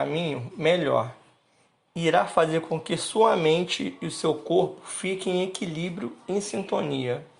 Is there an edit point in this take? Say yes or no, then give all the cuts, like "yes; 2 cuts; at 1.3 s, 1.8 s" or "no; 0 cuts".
no; 0 cuts